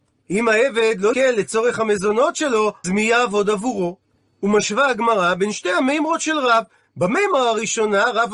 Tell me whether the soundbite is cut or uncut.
cut